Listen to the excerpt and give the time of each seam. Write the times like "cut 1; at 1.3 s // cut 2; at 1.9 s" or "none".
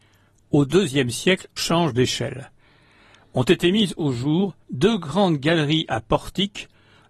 cut 1; at 1.6 s // cut 2; at 4.6 s